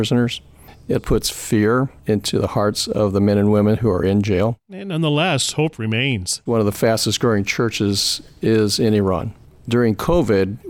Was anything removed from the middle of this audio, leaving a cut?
yes; 1 cut; at 1.0 s

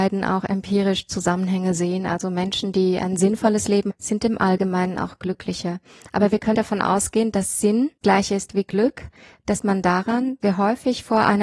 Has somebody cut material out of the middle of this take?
yes; 5 cuts; at 3.9 s, 6.5 s, 8.0 s, 9.6 s, 10.4 s

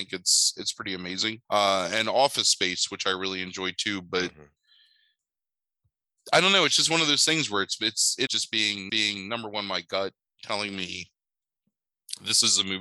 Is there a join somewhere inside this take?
yes; 3 cuts; at 1.4 s, 8.3 s, 8.9 s

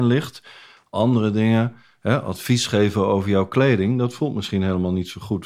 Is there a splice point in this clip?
no; 0 cuts

